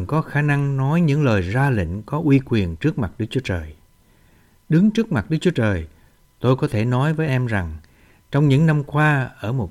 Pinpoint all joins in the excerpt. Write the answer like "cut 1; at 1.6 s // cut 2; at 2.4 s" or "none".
cut 1; at 7.3 s